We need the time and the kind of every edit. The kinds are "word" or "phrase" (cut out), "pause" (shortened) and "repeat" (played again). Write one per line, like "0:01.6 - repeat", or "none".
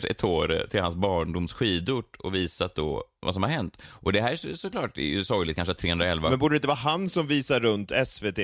none